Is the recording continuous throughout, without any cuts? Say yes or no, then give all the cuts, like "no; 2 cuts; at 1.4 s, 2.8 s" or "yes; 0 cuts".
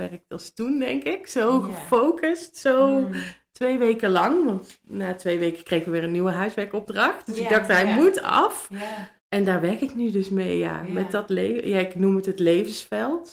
no; 1 cut; at 9.2 s